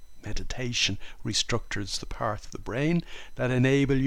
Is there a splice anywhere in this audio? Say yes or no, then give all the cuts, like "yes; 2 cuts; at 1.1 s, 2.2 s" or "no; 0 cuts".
yes; 1 cut; at 2.4 s